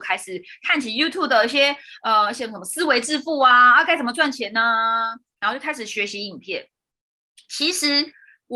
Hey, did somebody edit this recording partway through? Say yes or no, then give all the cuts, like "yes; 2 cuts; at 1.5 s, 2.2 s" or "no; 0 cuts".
no; 0 cuts